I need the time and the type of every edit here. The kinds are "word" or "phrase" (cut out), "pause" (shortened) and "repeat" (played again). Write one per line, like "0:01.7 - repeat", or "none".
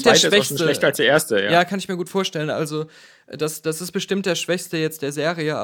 none